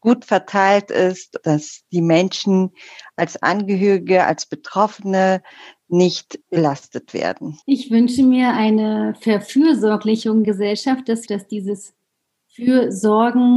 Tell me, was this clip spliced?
yes; 5 cuts; at 1.4 s, 6.4 s, 7.6 s, 10.4 s, 11.3 s

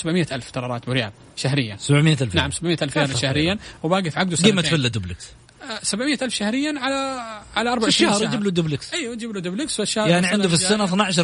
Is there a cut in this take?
no; 0 cuts

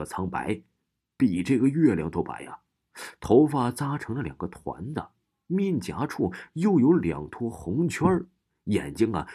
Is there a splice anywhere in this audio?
no; 0 cuts

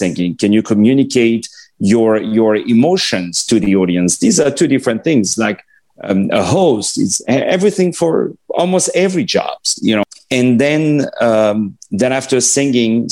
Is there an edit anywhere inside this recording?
no; 0 cuts

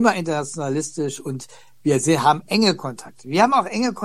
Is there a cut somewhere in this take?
no; 0 cuts

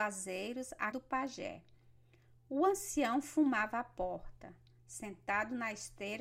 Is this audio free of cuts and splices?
no; 1 cut; at 0.9 s

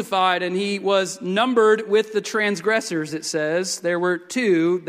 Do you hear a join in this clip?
no; 0 cuts

